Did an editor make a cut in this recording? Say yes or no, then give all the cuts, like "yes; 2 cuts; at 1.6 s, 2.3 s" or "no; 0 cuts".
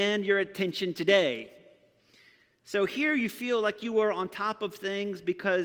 no; 0 cuts